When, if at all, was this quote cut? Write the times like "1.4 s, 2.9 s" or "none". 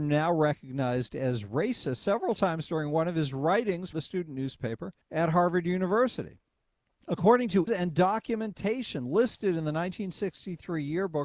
3.9 s, 5.0 s, 6.6 s, 7.7 s